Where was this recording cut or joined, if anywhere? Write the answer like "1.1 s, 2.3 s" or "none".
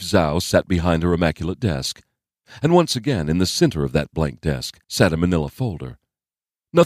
4.8 s